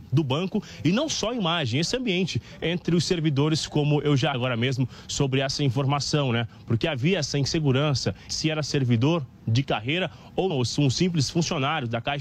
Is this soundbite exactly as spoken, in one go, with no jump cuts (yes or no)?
no